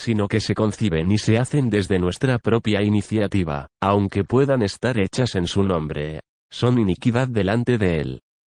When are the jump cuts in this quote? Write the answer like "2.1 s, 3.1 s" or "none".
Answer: 3.7 s